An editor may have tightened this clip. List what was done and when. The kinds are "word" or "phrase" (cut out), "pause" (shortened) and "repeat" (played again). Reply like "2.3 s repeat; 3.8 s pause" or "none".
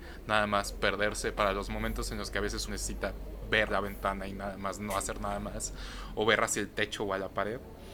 2.7 s word; 3.7 s word